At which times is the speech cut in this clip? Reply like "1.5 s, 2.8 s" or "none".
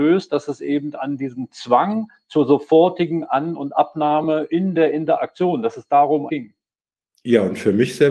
6.3 s